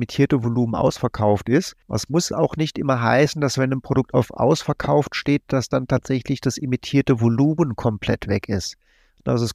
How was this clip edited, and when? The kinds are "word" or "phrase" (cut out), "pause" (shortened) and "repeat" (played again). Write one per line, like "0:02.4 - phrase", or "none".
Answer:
0:01.8 - pause